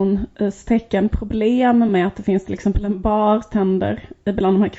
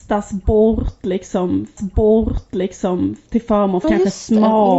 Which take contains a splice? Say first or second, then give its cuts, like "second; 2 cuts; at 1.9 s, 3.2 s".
second; 2 cuts; at 1.8 s, 3.8 s